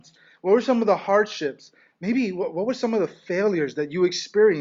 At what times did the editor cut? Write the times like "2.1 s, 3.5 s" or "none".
none